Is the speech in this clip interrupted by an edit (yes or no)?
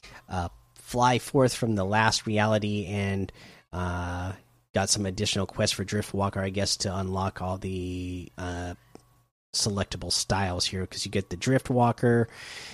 no